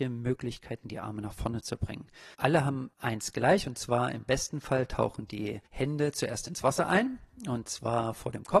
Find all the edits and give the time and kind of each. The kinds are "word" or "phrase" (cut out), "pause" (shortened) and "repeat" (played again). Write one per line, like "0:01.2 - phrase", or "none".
0:02.3 - pause
0:02.9 - pause
0:05.7 - pause